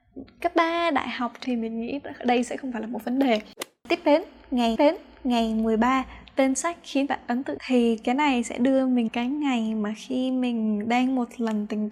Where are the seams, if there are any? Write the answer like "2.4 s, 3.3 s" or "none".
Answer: 1.4 s, 4.8 s, 7.1 s, 7.6 s, 9.1 s